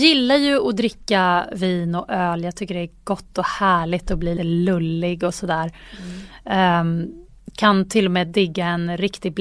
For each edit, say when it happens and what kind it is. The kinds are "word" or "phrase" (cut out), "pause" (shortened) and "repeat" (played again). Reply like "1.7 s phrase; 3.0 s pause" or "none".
4.4 s word

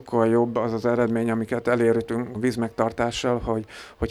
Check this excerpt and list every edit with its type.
2.3 s word

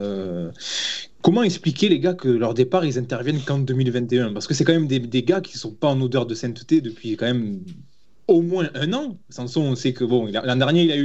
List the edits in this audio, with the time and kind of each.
none

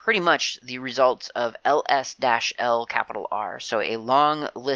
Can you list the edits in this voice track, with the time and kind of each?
none

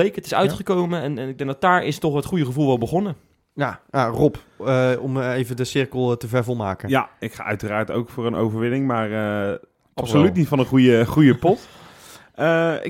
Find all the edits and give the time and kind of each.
none

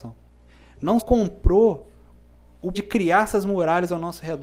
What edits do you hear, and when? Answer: 1.0 s word; 2.7 s word

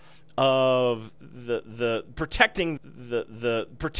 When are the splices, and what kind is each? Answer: 2.8 s repeat

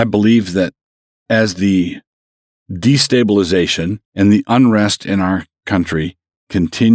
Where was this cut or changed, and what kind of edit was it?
4.0 s pause

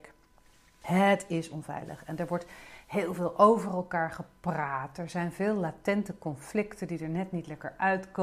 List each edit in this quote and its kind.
none

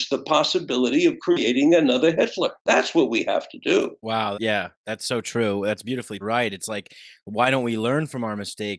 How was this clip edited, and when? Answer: 2.6 s pause; 4.3 s phrase; 6.2 s phrase

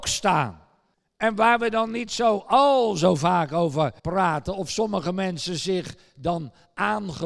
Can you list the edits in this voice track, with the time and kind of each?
0.9 s pause; 4.0 s pause

